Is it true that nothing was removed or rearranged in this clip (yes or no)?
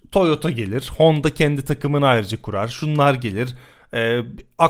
yes